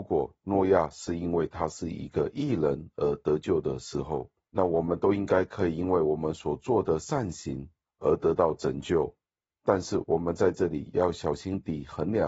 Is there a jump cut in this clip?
no; 0 cuts

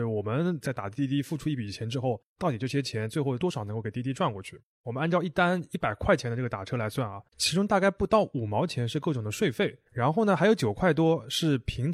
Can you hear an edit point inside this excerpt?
yes; 2 cuts; at 7.3 s, 9.9 s

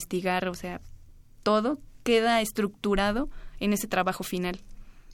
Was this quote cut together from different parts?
no; 0 cuts

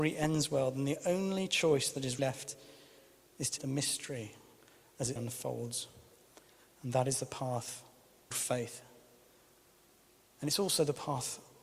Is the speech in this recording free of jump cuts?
no; 4 cuts; at 2.2 s, 3.6 s, 5.2 s, 8.3 s

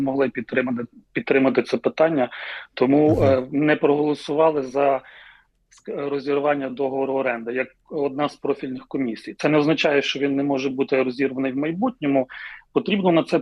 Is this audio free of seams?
yes; 0 cuts

